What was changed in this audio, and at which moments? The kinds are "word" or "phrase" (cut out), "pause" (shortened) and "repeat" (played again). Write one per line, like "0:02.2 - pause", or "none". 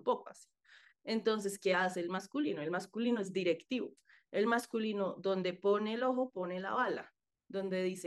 none